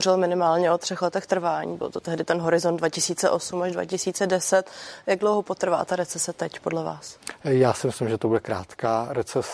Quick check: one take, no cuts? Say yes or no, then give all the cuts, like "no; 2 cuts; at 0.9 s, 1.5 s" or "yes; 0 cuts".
yes; 0 cuts